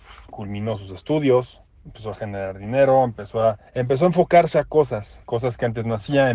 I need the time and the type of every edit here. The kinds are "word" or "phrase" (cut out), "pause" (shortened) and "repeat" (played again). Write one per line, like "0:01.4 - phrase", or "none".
0:03.7 - pause
0:05.2 - pause